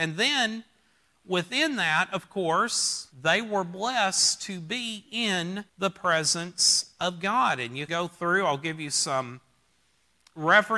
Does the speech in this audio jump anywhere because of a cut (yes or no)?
yes